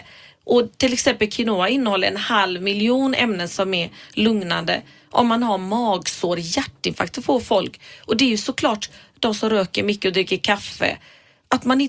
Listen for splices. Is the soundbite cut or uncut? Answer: uncut